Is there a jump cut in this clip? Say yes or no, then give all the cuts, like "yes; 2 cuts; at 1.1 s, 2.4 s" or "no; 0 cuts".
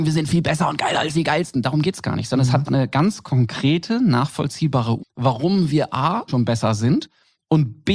yes; 4 cuts; at 1.1 s, 2.7 s, 5.0 s, 6.3 s